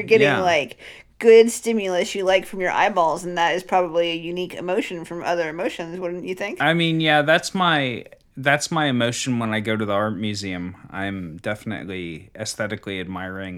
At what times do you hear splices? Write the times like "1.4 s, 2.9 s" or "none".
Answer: none